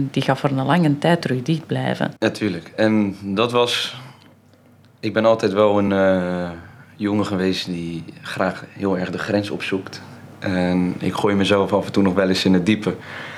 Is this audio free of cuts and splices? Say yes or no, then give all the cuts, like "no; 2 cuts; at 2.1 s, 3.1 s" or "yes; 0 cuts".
yes; 0 cuts